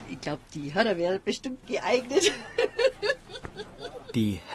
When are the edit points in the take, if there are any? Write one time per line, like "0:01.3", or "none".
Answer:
0:01.6